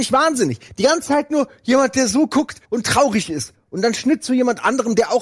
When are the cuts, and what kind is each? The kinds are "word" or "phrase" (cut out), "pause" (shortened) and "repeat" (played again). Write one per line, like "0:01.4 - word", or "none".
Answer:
0:02.6 - pause